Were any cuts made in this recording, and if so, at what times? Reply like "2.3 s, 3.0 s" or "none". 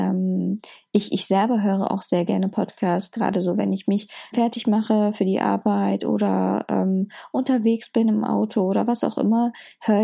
4.3 s